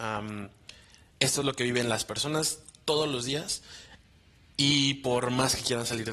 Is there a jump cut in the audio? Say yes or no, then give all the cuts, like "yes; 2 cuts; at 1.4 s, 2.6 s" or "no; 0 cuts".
no; 0 cuts